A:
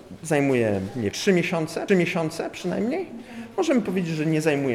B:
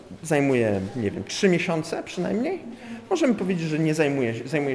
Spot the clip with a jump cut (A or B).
A